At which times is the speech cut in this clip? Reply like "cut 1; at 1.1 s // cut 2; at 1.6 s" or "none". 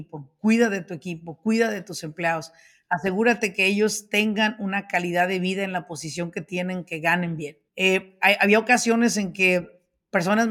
cut 1; at 7.7 s